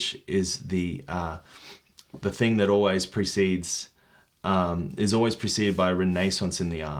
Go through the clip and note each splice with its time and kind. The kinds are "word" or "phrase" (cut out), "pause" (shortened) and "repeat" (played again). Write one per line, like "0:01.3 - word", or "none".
none